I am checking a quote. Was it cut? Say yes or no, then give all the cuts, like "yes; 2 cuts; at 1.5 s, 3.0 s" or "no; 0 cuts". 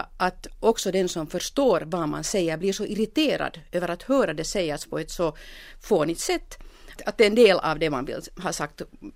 yes; 1 cut; at 7.0 s